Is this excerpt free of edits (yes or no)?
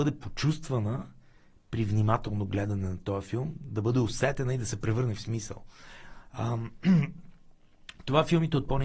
yes